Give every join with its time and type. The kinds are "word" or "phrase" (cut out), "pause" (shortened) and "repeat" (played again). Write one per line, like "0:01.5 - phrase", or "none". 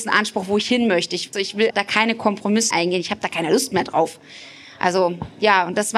0:01.3 - word
0:01.7 - word
0:02.7 - word